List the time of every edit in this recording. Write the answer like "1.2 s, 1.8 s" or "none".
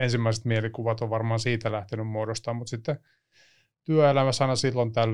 none